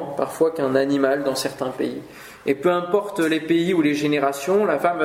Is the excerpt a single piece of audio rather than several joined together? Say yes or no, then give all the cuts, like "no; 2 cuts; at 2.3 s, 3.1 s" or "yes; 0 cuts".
yes; 0 cuts